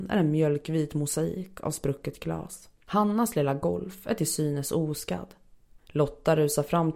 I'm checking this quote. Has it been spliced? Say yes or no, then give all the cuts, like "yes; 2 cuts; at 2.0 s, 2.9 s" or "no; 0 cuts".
yes; 1 cut; at 2.8 s